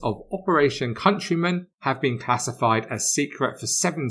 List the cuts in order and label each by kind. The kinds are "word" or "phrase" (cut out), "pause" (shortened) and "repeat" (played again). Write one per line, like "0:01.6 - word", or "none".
0:01.7 - pause